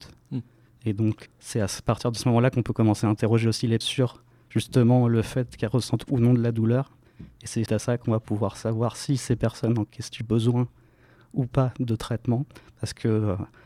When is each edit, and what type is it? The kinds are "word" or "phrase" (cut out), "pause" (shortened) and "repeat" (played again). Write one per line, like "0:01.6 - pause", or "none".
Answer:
0:01.3 - word
0:03.8 - word
0:07.7 - word
0:10.2 - word